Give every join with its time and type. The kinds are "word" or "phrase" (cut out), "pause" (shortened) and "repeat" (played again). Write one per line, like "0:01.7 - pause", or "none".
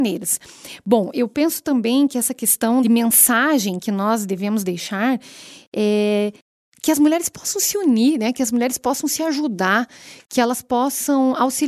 none